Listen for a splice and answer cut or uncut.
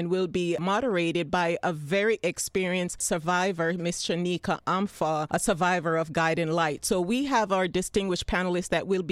uncut